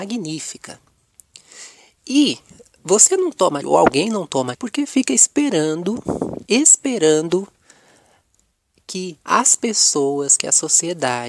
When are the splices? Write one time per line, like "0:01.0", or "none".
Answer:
0:03.6
0:04.5
0:06.5
0:09.2